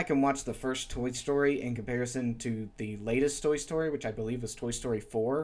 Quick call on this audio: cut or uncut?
uncut